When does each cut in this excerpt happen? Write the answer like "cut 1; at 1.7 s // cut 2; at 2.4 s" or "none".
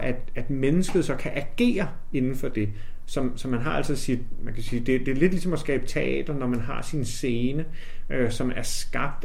none